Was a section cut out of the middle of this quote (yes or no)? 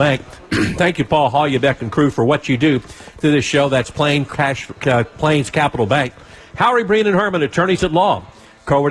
no